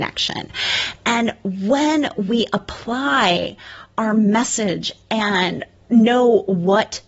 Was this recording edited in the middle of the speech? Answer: no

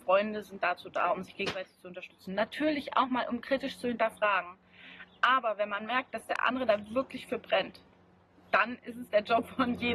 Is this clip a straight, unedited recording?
yes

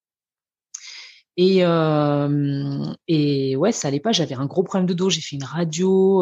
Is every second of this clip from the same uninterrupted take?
yes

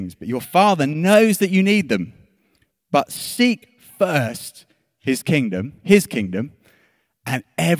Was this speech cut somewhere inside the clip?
no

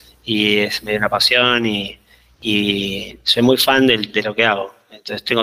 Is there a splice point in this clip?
no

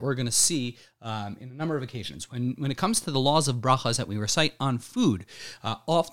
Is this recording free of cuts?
yes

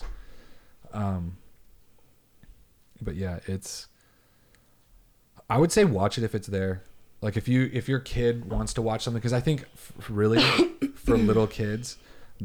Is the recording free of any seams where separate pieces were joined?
yes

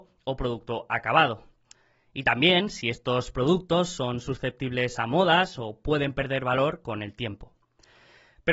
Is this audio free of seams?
yes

